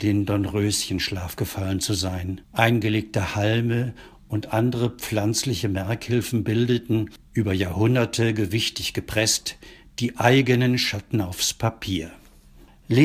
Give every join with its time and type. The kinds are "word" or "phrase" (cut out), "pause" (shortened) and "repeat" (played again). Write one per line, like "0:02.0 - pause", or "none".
0:02.4 - pause